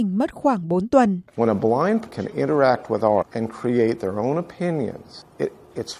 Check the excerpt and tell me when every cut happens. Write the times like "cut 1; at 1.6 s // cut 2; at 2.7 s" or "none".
cut 1; at 1.3 s // cut 2; at 2.1 s // cut 3; at 3.2 s